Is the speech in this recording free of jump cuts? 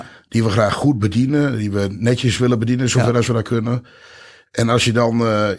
yes; 0 cuts

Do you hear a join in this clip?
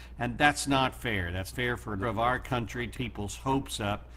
yes; 3 cuts; at 1.5 s, 2.0 s, 2.9 s

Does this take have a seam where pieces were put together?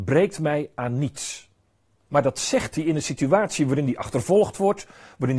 no; 0 cuts

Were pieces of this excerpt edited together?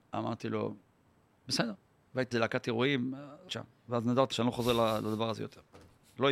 yes; 4 cuts; at 1.3 s, 2.3 s, 3.5 s, 4.3 s

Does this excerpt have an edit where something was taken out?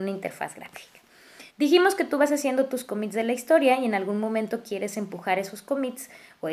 yes; 1 cut; at 1.5 s

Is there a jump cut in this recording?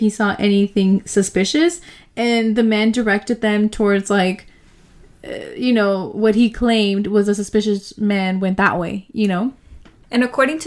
no; 0 cuts

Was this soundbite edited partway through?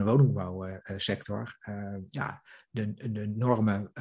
no; 0 cuts

